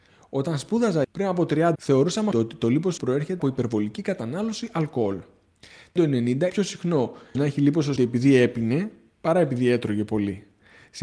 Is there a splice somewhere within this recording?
yes; 9 cuts; at 1.0 s, 1.7 s, 2.3 s, 3.0 s, 3.4 s, 6.0 s, 6.5 s, 7.3 s, 8.0 s

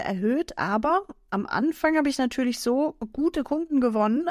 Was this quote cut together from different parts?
no; 0 cuts

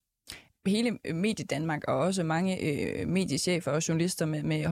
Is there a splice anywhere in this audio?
no; 0 cuts

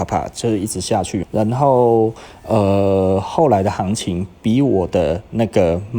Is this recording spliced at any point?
yes; 1 cut; at 1.2 s

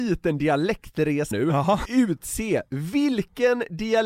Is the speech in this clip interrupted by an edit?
yes; 2 cuts; at 1.3 s, 1.9 s

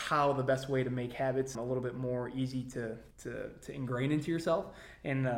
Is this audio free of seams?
no; 2 cuts; at 1.5 s, 3.1 s

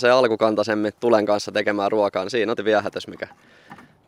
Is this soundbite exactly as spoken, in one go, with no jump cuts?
no; 1 cut; at 2.6 s

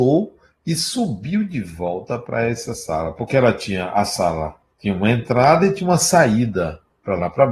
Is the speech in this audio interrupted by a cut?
yes; 1 cut; at 4.6 s

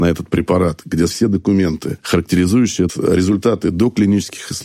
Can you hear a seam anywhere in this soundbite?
yes; 2 cuts; at 1.1 s, 2.9 s

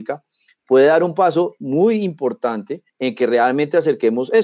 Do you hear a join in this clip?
yes; 1 cut; at 2.9 s

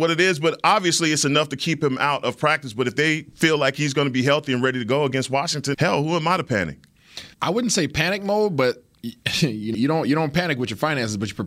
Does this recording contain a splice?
yes; 3 cuts; at 5.7 s, 7.3 s, 9.7 s

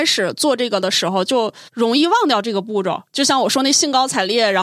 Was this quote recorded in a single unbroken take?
no; 1 cut; at 1.7 s

